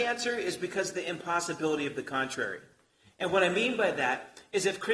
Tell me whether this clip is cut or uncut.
uncut